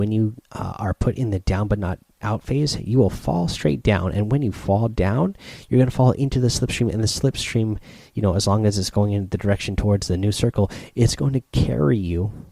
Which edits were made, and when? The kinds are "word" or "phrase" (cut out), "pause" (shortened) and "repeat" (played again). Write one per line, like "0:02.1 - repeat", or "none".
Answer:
none